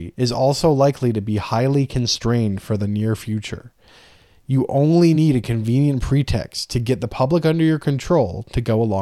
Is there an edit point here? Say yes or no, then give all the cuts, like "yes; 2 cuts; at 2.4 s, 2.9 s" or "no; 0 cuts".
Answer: no; 0 cuts